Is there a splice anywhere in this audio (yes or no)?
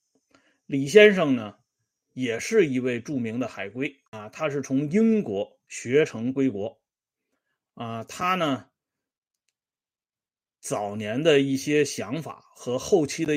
no